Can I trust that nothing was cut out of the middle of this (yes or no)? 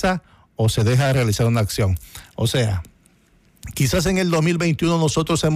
yes